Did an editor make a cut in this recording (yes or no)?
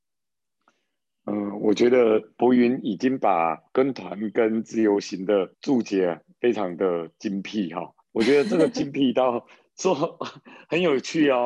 yes